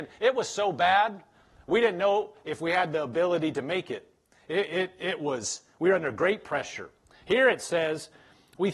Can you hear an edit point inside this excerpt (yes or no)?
no